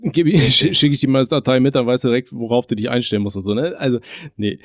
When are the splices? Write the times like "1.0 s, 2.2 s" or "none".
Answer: none